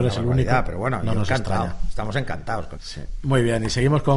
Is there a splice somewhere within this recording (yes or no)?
yes